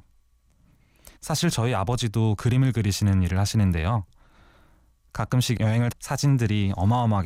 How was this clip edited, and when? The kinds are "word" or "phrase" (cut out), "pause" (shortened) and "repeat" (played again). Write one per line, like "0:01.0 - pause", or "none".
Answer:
0:01.2 - pause
0:05.9 - word

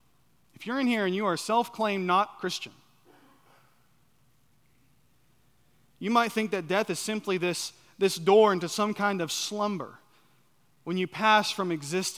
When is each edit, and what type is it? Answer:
none

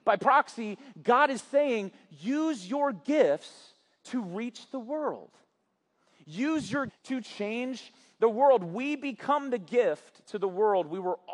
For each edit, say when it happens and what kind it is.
0:06.9 - word

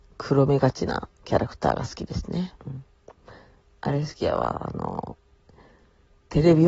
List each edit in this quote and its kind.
0:02.6 - pause

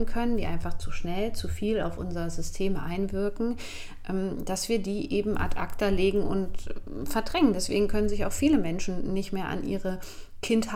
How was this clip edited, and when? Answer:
none

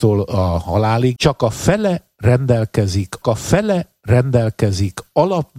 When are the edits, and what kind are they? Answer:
0:01.2 - word
0:03.2 - repeat

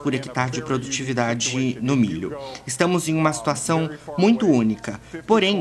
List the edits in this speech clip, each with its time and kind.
none

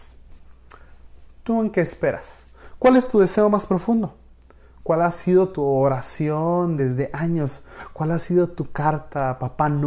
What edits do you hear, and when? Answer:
none

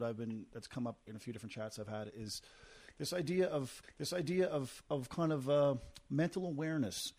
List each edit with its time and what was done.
0:01.1 - word
0:03.8 - repeat

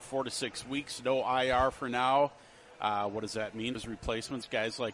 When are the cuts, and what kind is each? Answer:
0:03.7 - word

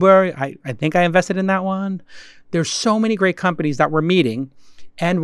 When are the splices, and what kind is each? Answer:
none

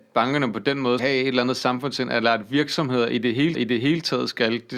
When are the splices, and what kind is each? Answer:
0:01.0 - word
0:03.5 - repeat

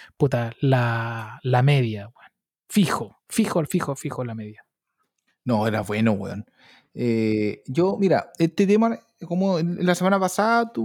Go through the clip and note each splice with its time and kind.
none

